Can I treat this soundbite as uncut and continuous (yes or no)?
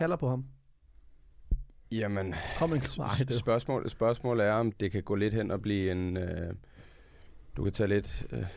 no